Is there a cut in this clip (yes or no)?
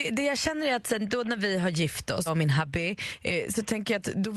yes